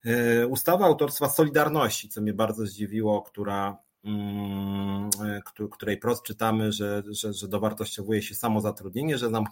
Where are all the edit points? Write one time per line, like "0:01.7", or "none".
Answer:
none